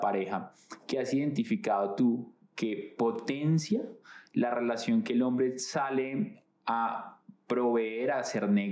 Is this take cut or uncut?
uncut